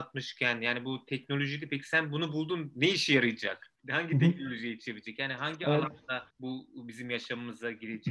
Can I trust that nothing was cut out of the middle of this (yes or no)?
no